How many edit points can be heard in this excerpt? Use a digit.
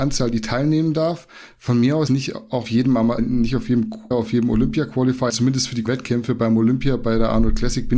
6